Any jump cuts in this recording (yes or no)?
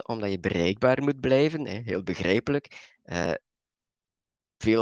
no